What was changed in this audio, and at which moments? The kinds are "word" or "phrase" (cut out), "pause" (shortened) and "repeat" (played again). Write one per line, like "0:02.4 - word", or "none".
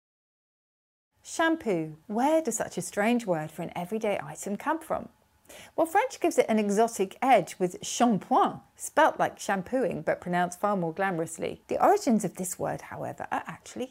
0:02.0 - pause
0:11.6 - pause